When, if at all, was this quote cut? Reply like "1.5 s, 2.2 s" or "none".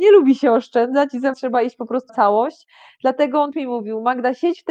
1.3 s, 2.1 s, 3.5 s